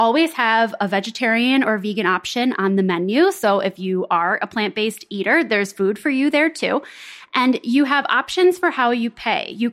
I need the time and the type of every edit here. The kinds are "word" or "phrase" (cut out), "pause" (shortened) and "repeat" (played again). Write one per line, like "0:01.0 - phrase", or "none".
none